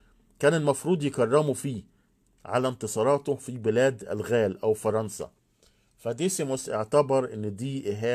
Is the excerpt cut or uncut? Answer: uncut